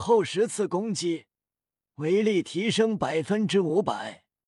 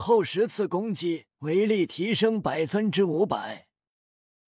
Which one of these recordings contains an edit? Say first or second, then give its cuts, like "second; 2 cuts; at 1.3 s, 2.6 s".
second; 1 cut; at 1.3 s